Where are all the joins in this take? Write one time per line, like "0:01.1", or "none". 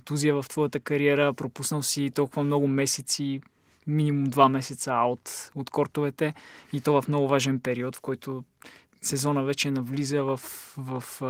none